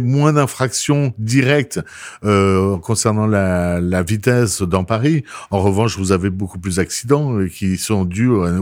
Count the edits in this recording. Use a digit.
0